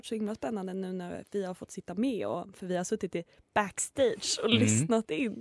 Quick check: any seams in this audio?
no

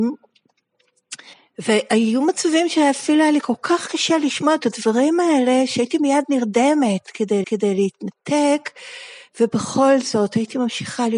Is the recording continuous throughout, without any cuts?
no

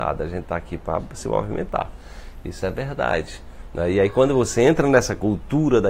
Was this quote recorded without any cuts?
yes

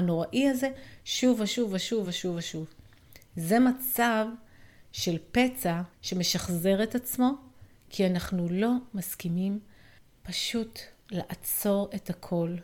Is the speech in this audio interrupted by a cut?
yes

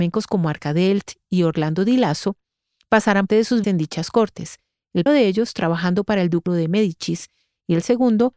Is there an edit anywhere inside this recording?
yes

